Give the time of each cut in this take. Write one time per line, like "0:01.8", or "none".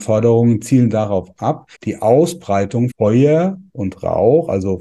0:01.7
0:02.9